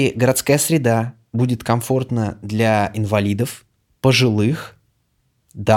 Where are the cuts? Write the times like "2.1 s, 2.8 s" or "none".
none

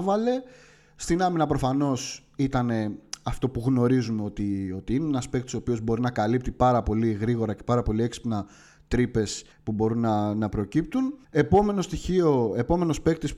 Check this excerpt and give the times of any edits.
9.5 s, 11.2 s

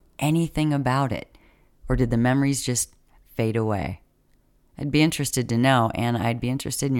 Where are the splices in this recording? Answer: none

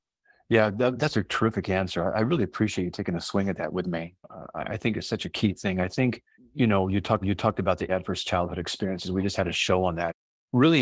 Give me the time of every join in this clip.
6.3 s, 7.2 s, 7.9 s

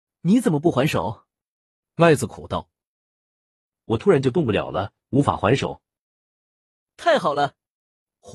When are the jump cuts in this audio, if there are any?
none

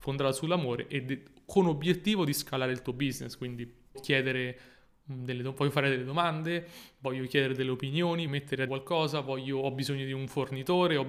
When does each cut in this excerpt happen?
3.9 s, 8.3 s, 8.7 s

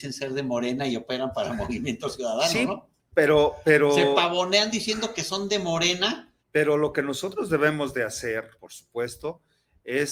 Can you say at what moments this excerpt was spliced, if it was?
6.4 s, 8.6 s

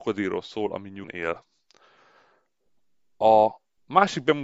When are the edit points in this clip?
1.0 s

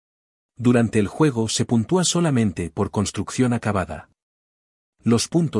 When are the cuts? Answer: none

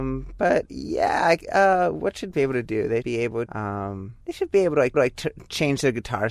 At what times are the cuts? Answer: 1.5 s, 2.3 s, 3.0 s, 3.5 s, 4.2 s, 4.9 s

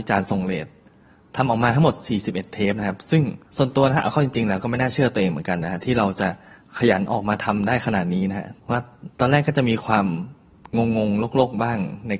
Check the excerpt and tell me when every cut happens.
3.5 s, 8.6 s, 9.1 s

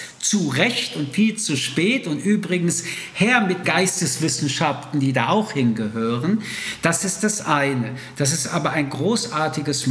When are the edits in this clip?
3.6 s

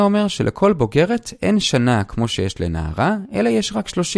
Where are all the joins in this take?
none

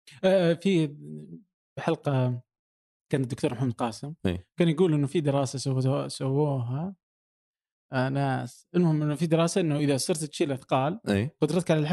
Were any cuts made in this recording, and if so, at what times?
none

